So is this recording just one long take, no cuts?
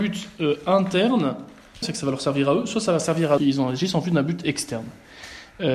no; 2 cuts; at 1.8 s, 3.4 s

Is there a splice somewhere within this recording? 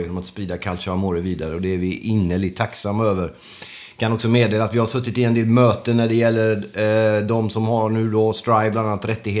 no; 0 cuts

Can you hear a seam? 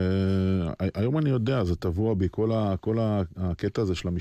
no; 0 cuts

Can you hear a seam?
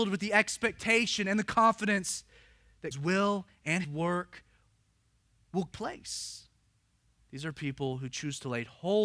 yes; 3 cuts; at 2.9 s, 3.8 s, 5.7 s

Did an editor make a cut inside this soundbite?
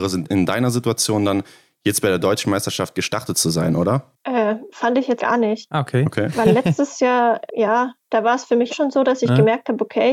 yes; 3 cuts; at 5.2 s, 7.5 s, 8.7 s

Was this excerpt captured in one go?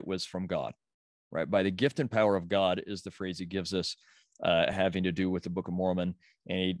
yes; 0 cuts

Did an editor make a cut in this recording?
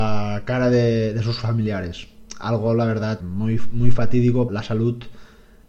yes; 2 cuts; at 3.2 s, 4.5 s

